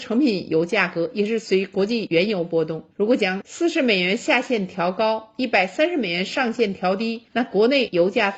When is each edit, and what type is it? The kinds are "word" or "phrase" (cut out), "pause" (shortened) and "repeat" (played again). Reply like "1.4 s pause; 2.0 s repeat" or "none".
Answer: 2.9 s pause; 7.3 s pause